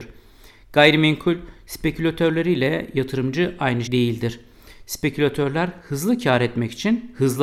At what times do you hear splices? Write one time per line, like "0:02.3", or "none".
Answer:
0:03.9